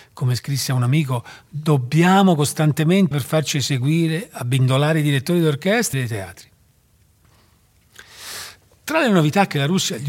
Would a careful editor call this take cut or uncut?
cut